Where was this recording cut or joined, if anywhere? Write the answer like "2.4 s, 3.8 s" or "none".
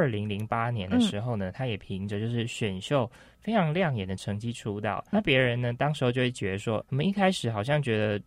5.1 s, 6.8 s